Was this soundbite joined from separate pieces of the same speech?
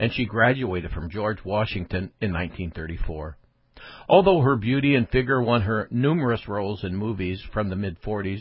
no; 0 cuts

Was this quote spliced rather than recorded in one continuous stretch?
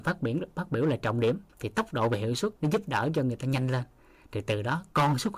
yes; 2 cuts; at 1.5 s, 2.6 s

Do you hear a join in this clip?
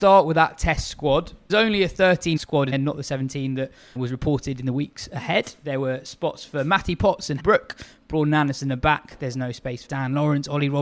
yes; 6 cuts; at 1.5 s, 2.4 s, 2.7 s, 4.0 s, 7.4 s, 9.9 s

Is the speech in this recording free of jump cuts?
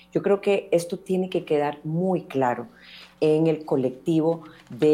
yes; 0 cuts

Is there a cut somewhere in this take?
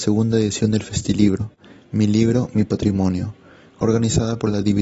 no; 0 cuts

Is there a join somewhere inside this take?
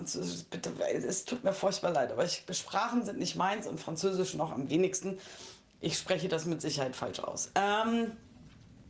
no; 0 cuts

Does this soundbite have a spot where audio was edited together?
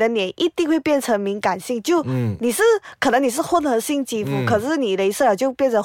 no; 0 cuts

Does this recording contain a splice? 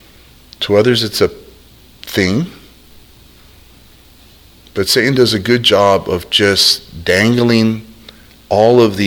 no; 0 cuts

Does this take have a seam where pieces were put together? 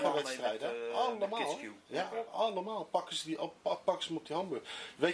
no; 0 cuts

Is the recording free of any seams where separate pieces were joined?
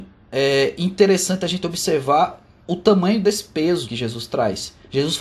no; 1 cut; at 3.8 s

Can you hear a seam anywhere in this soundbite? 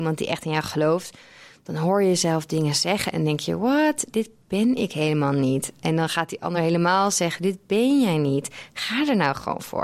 no; 0 cuts

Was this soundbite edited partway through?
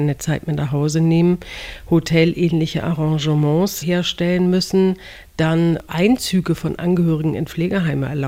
yes; 2 cuts; at 3.8 s, 5.9 s

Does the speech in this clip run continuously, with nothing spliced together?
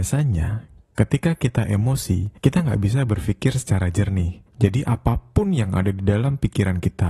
no; 2 cuts; at 2.4 s, 4.5 s

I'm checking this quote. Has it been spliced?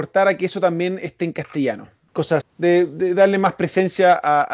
yes; 1 cut; at 2.4 s

